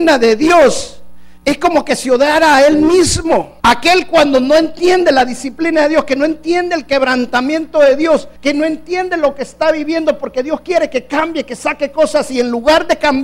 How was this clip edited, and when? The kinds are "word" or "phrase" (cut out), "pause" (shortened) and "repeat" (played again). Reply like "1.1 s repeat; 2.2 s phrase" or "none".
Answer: 1.4 s pause; 3.6 s pause; 8.4 s pause